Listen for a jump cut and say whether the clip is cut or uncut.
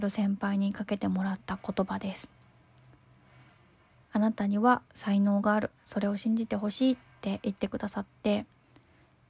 cut